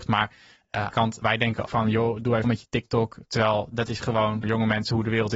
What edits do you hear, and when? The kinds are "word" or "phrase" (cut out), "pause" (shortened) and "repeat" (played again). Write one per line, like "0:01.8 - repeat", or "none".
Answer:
0:00.9 - word
0:01.2 - word
0:01.7 - word
0:02.4 - word
0:04.4 - word